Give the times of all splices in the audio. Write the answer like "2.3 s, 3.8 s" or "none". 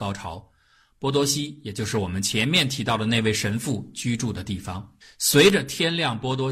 5.0 s